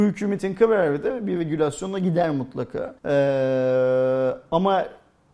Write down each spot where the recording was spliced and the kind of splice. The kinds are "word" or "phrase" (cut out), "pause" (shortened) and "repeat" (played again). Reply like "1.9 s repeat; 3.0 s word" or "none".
3.0 s pause